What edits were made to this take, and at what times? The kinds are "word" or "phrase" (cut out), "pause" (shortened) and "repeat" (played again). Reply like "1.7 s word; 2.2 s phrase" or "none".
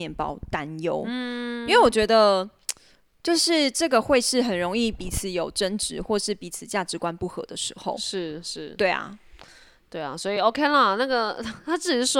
none